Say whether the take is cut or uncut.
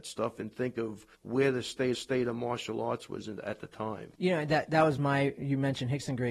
cut